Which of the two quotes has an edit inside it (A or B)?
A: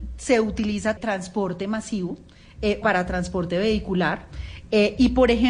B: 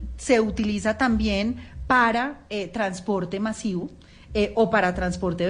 A